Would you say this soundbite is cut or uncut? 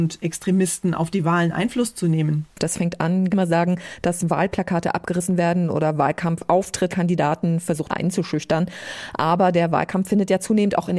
cut